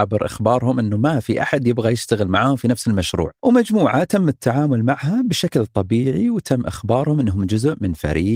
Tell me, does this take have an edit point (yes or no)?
yes